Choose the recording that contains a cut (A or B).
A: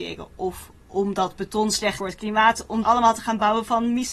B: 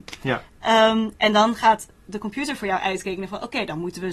A